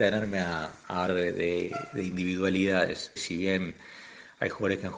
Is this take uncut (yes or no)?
no